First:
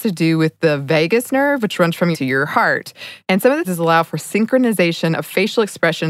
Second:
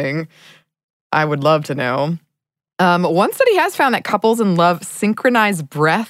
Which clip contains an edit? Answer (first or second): first